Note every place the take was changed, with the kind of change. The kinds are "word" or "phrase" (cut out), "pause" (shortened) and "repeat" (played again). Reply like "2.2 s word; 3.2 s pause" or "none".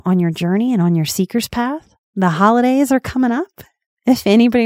2.0 s pause